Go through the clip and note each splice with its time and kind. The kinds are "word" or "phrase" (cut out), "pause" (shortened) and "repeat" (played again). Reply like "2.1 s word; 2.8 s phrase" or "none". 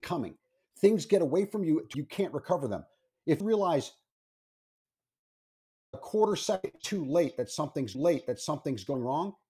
1.9 s phrase; 3.4 s word; 7.9 s repeat